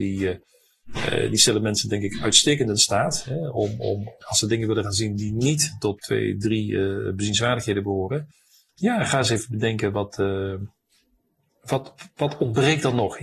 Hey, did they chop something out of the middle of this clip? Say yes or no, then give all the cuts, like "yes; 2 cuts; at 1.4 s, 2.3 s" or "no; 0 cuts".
no; 0 cuts